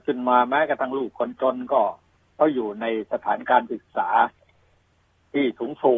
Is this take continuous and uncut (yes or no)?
no